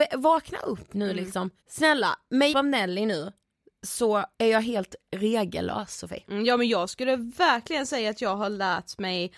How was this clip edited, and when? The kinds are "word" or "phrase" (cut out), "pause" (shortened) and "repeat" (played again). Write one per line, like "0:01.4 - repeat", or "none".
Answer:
0:01.6 - pause
0:02.5 - word
0:04.3 - pause